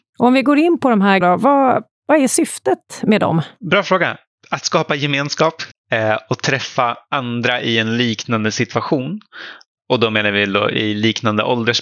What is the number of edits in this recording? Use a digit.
2